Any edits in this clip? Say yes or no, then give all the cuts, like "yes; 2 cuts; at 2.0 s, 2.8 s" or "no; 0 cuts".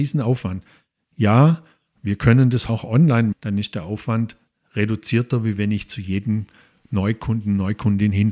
yes; 2 cuts; at 2.7 s, 3.3 s